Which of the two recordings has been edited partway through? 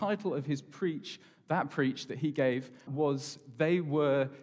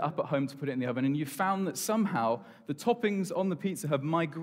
first; 1 cut; at 2.9 s

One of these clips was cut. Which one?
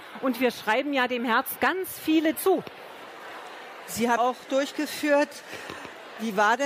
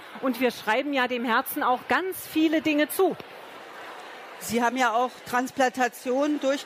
first; 4 cuts; at 1.6 s, 2.4 s, 4.2 s, 4.5 s

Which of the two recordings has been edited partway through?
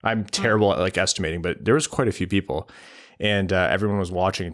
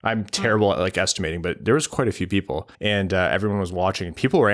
second; 1 cut; at 2.7 s

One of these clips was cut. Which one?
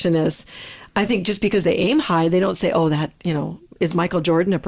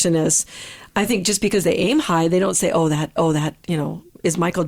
second; 1 cut; at 3.2 s

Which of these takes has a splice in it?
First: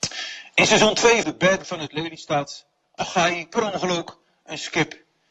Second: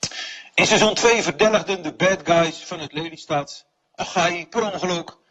first; 2 cuts; at 1.2 s, 1.6 s

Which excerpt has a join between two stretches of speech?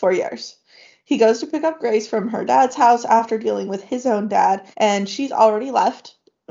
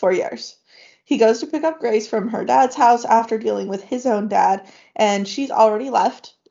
first; 1 cut; at 4.7 s

